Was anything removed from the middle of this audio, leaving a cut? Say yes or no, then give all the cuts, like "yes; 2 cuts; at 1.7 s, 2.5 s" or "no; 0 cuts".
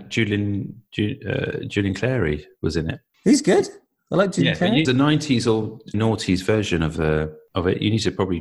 yes; 2 cuts; at 4.8 s, 5.9 s